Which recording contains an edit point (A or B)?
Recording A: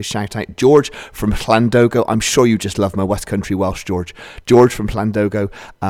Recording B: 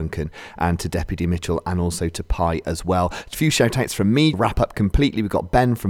B